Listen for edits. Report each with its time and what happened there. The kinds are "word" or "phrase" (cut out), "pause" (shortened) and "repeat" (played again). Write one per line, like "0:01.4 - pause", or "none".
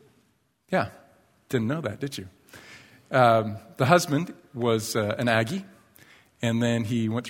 none